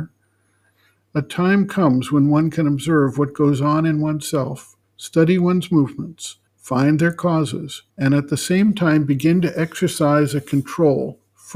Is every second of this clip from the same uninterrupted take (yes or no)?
no